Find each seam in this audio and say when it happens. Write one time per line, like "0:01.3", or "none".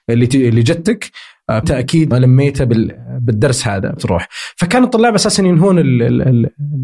0:01.6
0:02.1
0:04.0